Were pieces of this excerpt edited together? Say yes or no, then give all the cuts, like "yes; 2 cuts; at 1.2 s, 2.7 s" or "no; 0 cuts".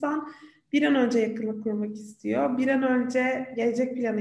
no; 0 cuts